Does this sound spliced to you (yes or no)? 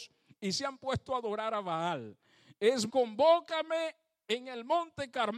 yes